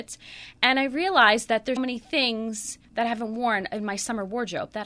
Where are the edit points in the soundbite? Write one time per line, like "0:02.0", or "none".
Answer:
0:01.8
0:02.8